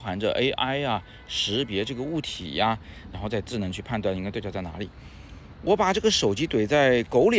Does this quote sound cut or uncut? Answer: cut